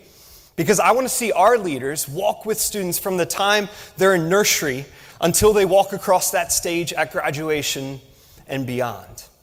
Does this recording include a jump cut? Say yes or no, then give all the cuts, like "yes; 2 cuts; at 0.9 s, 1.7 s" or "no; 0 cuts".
no; 0 cuts